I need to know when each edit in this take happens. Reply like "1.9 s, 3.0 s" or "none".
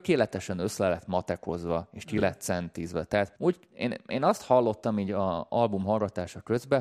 3.4 s

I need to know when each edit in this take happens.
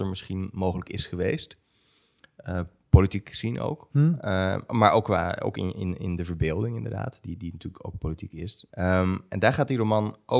8.7 s

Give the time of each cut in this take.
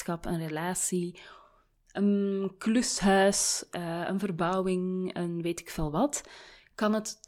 none

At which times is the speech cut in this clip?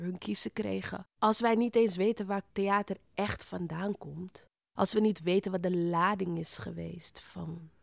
1.1 s, 2.5 s

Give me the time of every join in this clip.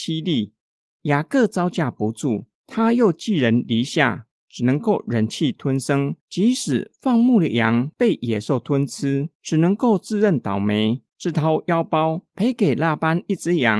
2.6 s, 6.2 s, 9.3 s, 11.1 s

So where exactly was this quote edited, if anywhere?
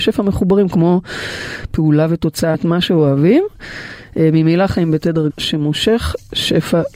2.5 s, 5.3 s

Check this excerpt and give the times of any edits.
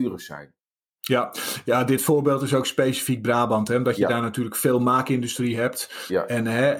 none

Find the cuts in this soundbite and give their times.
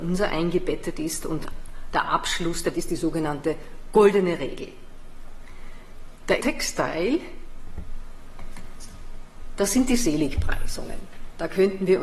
2.7 s, 6.4 s

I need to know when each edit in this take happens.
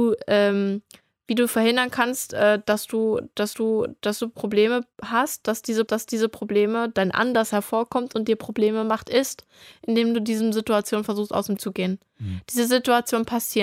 3.5 s, 5.9 s, 11.6 s

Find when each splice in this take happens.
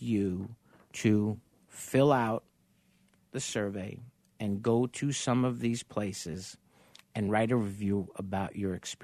none

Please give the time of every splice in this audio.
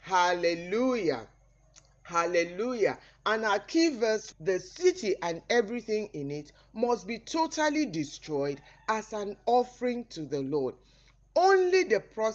4.3 s

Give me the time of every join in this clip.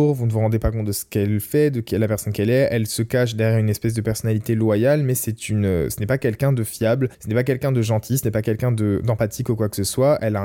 7.1 s

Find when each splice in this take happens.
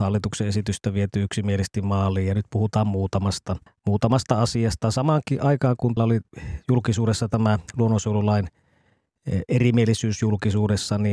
3.7 s, 6.0 s

